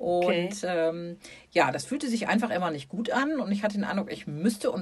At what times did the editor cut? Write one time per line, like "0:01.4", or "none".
none